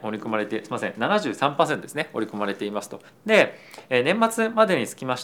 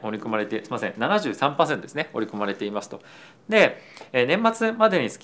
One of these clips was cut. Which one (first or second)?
first